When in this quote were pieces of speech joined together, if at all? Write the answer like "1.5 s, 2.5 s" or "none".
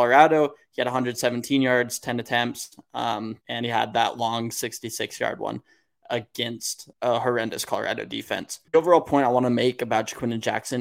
3.4 s, 6.9 s, 8.7 s